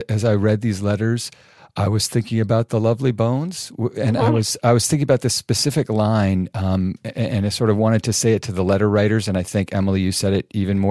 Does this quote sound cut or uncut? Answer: uncut